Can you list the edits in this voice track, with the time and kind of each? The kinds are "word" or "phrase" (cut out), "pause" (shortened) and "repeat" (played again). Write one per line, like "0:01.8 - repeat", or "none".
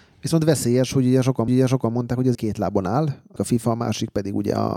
0:01.5 - repeat
0:02.3 - word
0:03.4 - word